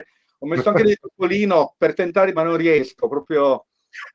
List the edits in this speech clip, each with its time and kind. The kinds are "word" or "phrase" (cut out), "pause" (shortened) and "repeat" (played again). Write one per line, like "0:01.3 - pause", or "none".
0:02.4 - phrase